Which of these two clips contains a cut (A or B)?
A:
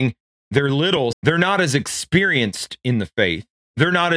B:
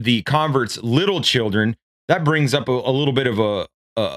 A